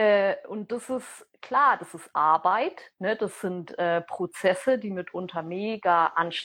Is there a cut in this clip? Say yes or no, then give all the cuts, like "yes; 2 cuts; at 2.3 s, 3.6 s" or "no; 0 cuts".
no; 0 cuts